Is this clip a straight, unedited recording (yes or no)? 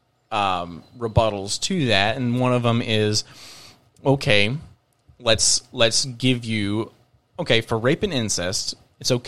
yes